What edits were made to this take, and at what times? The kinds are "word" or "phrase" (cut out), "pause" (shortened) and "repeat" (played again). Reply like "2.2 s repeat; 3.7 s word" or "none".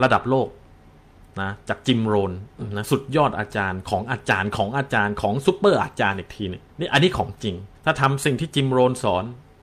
6.7 s pause; 7.7 s pause